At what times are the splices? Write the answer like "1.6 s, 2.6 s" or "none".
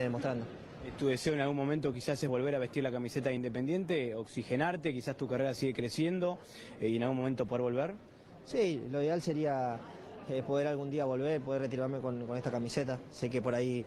none